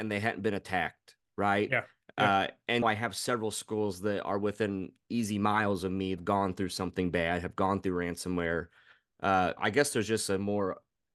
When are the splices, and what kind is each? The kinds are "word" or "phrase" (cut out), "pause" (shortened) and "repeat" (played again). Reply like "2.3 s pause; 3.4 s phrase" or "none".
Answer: 2.8 s word; 6.2 s phrase; 9.6 s word